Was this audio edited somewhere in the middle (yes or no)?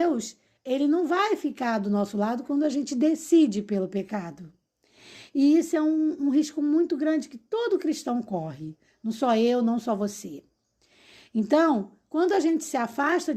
no